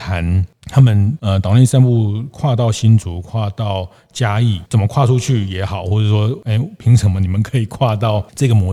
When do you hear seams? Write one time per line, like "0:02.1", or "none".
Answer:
none

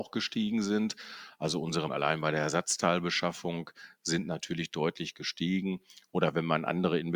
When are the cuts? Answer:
0:01.9

